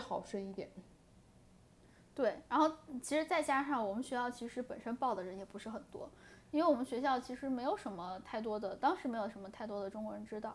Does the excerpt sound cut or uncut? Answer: uncut